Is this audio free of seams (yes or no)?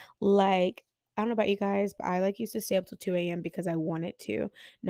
yes